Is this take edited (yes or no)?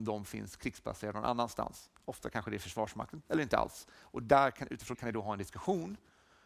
yes